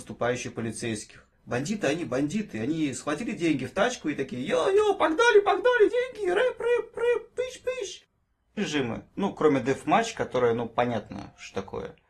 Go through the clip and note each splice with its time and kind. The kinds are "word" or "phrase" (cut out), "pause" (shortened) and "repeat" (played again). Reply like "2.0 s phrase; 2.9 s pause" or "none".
1.3 s pause; 5.9 s word; 6.9 s repeat; 8.6 s phrase